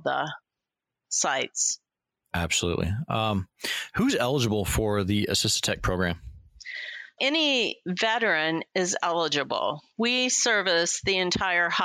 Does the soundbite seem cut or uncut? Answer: cut